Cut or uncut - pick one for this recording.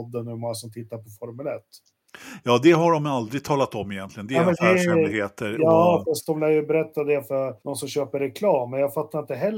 cut